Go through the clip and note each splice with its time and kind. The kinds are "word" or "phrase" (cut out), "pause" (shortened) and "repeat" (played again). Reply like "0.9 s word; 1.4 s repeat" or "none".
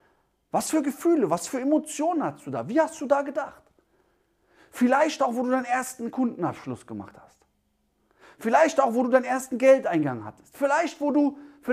none